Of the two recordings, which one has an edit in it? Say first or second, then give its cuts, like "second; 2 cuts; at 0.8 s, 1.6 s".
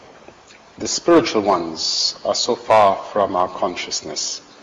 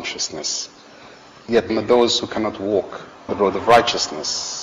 second; 2 cuts; at 1.7 s, 3.3 s